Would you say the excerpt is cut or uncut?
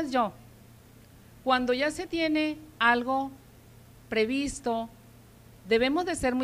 uncut